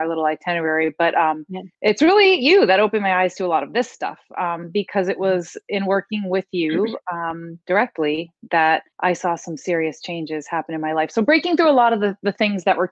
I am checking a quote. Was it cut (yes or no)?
yes